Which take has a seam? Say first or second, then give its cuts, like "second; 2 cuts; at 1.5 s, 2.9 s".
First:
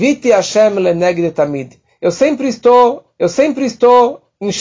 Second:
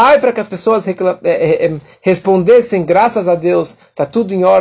first; 1 cut; at 3.2 s